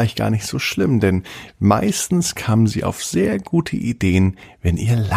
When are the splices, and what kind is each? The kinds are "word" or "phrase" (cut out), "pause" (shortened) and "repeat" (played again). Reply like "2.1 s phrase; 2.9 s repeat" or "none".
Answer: none